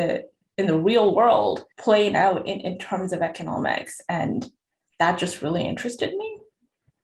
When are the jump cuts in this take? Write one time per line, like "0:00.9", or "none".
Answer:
0:01.7